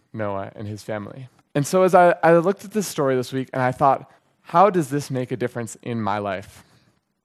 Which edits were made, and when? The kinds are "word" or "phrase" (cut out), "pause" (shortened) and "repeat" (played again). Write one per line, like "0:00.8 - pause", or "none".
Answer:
0:01.4 - pause
0:04.2 - pause